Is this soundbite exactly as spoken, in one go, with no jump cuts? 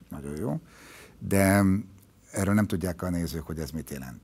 yes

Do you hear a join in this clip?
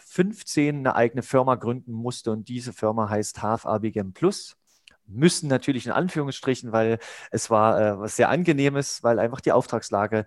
no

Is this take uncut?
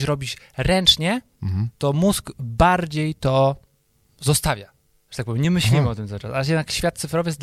yes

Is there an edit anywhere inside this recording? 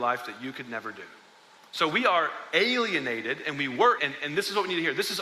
yes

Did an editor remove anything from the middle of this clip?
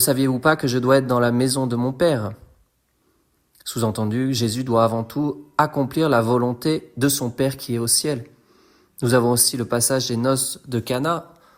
no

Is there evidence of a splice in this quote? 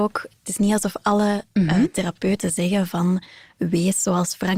no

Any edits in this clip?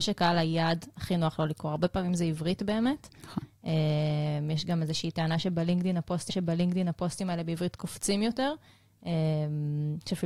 yes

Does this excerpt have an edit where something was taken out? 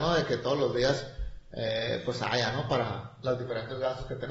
no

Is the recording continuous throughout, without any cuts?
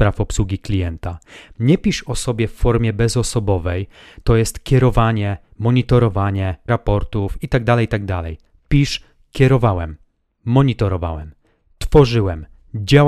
no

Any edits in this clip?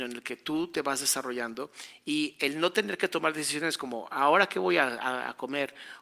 no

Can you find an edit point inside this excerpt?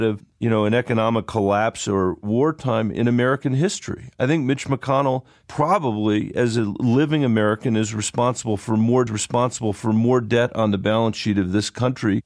yes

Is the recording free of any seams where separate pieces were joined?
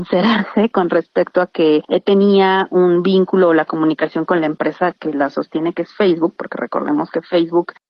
yes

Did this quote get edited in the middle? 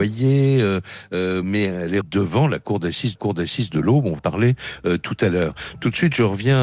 yes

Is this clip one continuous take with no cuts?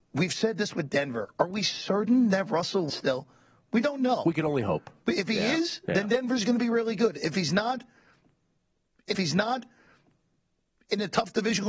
no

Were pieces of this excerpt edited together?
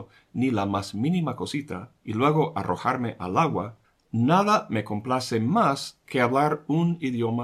yes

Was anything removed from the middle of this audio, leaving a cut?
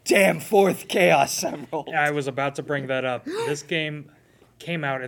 no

